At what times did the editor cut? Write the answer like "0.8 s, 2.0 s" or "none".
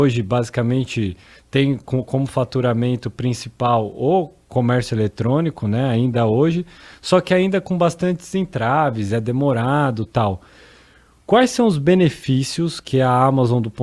none